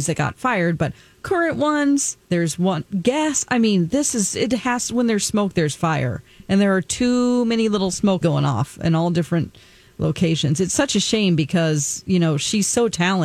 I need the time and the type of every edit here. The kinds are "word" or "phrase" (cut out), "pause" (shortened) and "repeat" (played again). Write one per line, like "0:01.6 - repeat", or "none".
0:02.2 - pause
0:08.2 - word